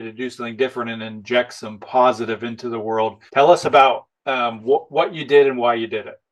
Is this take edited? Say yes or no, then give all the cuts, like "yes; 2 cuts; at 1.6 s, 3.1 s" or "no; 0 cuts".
yes; 2 cuts; at 3.3 s, 4.2 s